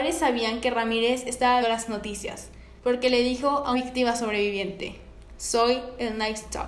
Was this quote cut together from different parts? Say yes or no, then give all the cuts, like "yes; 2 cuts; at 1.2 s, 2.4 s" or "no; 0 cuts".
yes; 3 cuts; at 1.6 s, 2.8 s, 3.7 s